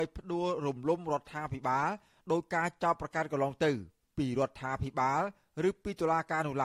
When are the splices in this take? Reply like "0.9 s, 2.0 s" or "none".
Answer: none